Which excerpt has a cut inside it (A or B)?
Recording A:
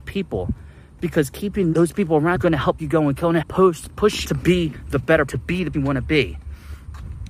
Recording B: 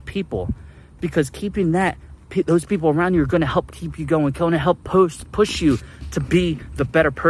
A